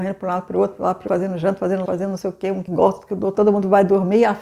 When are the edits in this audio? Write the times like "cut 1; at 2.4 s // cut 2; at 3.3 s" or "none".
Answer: cut 1; at 1.1 s // cut 2; at 1.9 s // cut 3; at 2.7 s // cut 4; at 3.3 s